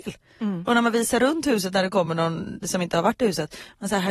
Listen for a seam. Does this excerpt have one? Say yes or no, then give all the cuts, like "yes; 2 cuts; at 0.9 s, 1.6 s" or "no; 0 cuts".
no; 0 cuts